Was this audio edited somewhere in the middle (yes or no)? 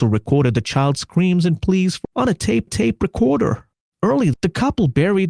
yes